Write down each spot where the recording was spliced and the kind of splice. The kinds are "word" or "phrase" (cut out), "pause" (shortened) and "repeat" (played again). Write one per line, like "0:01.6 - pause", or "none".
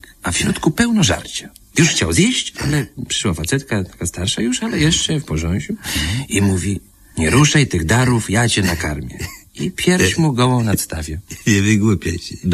none